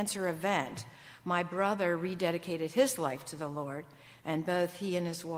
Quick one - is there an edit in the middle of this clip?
no; 0 cuts

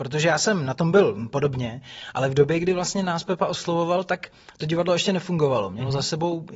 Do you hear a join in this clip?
no; 0 cuts

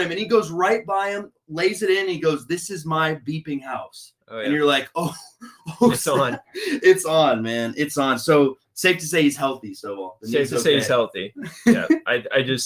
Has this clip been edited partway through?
yes; 2 cuts; at 4.2 s, 6.4 s

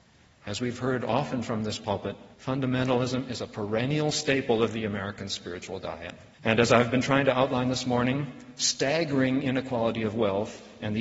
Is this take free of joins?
no; 2 cuts; at 2.3 s, 6.3 s

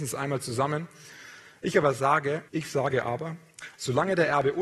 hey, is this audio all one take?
no; 1 cut; at 2.5 s

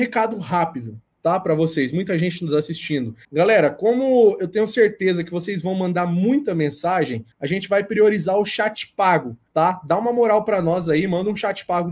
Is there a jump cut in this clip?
yes; 3 cuts; at 3.2 s, 7.3 s, 9.5 s

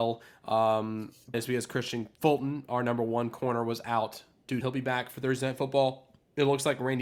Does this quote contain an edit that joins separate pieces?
yes; 3 cuts; at 1.3 s, 2.1 s, 4.6 s

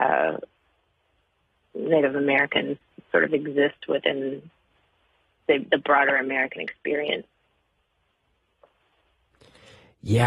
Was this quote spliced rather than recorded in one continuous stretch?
no; 0 cuts

